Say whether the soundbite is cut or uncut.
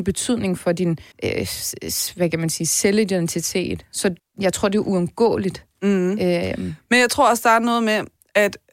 cut